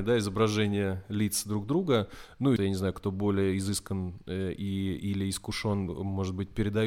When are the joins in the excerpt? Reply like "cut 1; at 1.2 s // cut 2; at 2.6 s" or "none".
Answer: cut 1; at 2.6 s